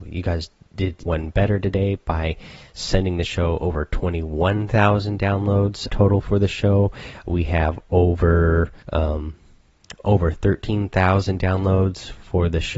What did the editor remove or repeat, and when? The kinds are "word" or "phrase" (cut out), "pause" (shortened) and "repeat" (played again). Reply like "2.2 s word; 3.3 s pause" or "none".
1.1 s word; 5.9 s word; 8.8 s pause